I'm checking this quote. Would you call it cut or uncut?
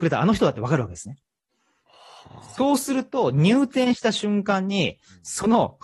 uncut